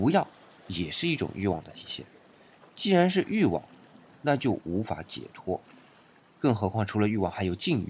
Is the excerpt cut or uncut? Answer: uncut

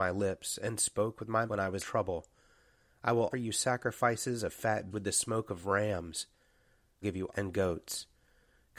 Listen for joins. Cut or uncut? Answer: cut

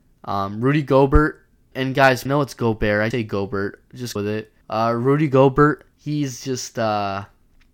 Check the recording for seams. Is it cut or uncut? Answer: cut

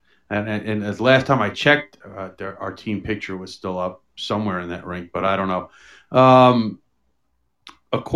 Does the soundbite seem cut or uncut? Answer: uncut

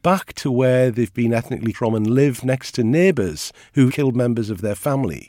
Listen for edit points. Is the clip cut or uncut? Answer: cut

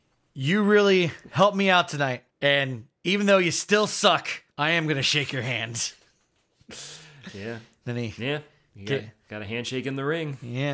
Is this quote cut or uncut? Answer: cut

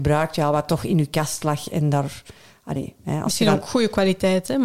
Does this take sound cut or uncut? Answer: uncut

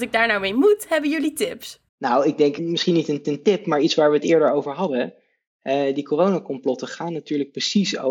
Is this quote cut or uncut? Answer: cut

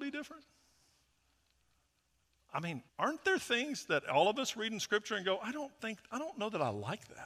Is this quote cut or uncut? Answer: cut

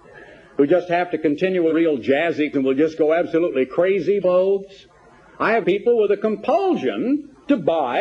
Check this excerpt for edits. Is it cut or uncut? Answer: cut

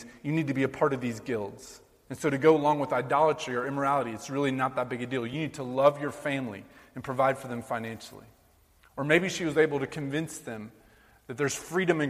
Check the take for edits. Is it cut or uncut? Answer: uncut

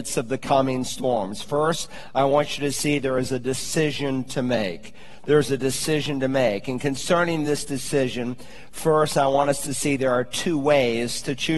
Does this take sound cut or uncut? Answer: uncut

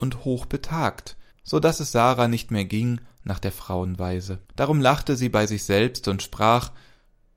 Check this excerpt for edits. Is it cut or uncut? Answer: cut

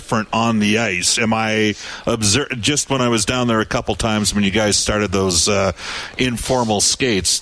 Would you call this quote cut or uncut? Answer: uncut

